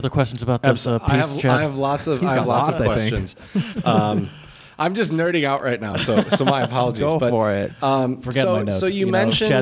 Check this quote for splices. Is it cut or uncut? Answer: uncut